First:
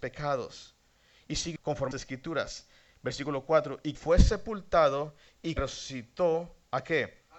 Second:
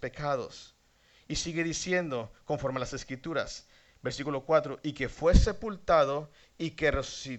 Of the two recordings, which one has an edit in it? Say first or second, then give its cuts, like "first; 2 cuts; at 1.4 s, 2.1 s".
first; 4 cuts; at 1.6 s, 1.9 s, 3.9 s, 5.6 s